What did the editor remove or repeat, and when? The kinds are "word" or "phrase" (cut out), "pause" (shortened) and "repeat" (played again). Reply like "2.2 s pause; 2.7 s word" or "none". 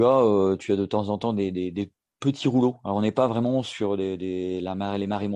none